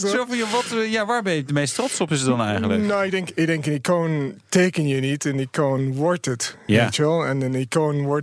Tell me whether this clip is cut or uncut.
uncut